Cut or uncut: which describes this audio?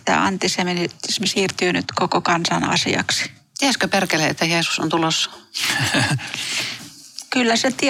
uncut